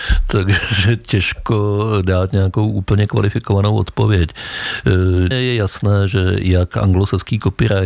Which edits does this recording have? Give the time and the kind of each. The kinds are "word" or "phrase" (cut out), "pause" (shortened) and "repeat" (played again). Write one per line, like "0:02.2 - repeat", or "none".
0:05.3 - word

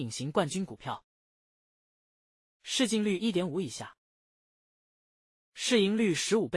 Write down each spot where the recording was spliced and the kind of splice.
none

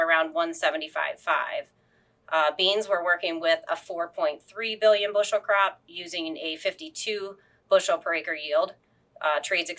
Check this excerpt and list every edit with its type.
none

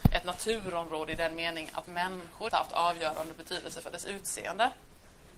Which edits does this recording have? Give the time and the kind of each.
0:02.5 - word

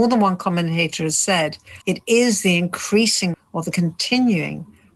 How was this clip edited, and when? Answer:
0:01.8 - pause
0:03.3 - word

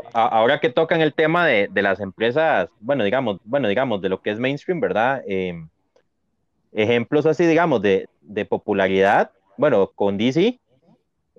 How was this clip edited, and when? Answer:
0:03.4 - repeat
0:08.1 - word

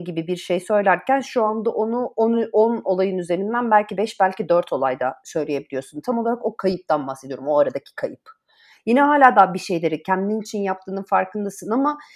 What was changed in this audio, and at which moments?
none

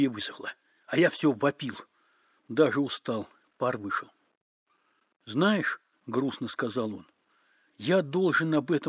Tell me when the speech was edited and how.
none

